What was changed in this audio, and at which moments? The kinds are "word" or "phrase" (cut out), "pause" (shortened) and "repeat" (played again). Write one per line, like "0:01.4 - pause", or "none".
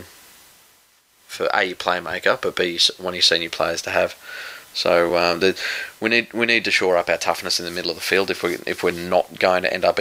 none